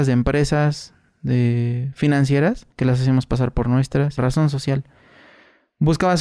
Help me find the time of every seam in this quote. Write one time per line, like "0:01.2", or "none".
0:02.7
0:04.2